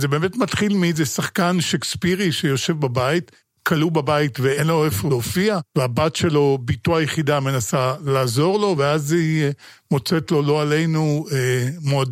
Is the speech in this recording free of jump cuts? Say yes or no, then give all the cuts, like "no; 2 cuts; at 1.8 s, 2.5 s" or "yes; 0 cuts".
yes; 0 cuts